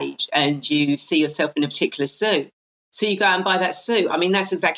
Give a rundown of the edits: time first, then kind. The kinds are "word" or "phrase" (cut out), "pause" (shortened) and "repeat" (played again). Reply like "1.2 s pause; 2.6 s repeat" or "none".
none